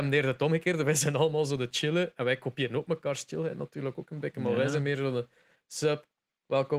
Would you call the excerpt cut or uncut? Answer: uncut